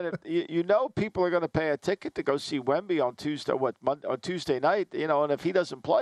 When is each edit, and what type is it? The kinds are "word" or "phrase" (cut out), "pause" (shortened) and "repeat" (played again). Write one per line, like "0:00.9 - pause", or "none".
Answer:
none